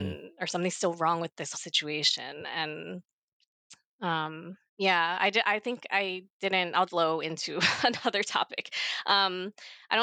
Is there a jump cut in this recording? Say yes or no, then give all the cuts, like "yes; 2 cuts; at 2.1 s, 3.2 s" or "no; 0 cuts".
yes; 4 cuts; at 1.5 s, 4.7 s, 6.3 s, 6.9 s